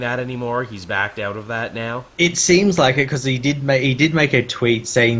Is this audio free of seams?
no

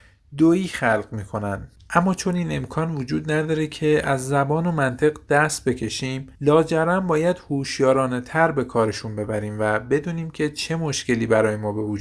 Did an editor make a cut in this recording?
yes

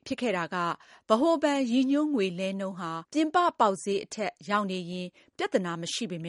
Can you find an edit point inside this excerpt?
yes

